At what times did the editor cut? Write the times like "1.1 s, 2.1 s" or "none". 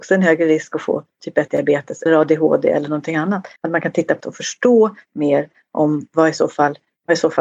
2.1 s, 3.6 s, 4.2 s